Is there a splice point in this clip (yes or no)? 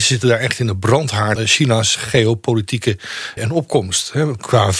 yes